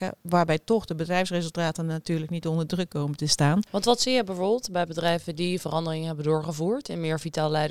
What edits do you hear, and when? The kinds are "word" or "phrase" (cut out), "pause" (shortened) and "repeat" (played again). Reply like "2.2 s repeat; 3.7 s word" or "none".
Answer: 3.7 s pause